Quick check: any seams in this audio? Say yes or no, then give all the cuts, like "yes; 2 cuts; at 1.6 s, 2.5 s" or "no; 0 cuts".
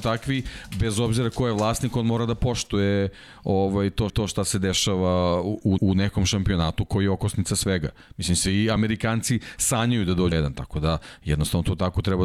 yes; 4 cuts; at 4.1 s, 5.8 s, 6.9 s, 10.3 s